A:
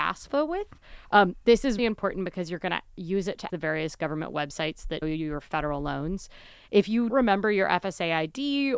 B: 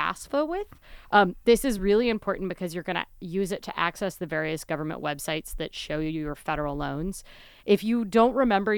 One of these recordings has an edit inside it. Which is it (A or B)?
A